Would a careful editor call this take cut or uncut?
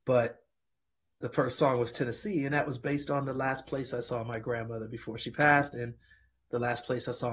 uncut